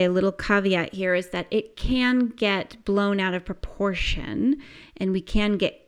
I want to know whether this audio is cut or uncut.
uncut